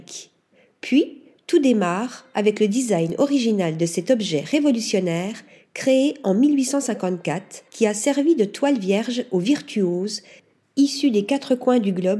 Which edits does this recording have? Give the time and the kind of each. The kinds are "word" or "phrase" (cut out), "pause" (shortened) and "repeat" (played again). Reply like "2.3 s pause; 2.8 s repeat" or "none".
7.7 s pause